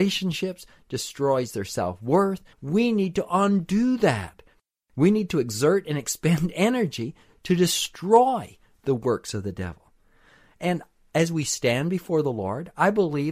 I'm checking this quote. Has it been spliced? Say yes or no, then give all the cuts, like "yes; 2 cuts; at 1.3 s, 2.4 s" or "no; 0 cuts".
yes; 1 cut; at 2.5 s